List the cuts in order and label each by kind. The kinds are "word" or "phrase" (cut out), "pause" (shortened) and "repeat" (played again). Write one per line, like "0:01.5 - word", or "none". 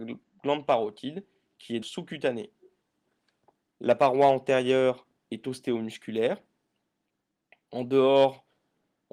0:01.8 - word